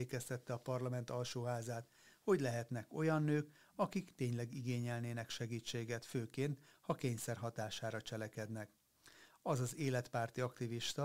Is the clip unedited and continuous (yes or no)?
yes